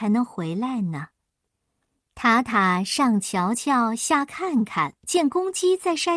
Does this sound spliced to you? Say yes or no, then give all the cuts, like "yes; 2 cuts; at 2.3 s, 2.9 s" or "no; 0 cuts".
yes; 1 cut; at 5.0 s